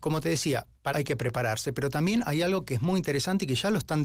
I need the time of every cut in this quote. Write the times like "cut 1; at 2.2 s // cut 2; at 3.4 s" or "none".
cut 1; at 0.9 s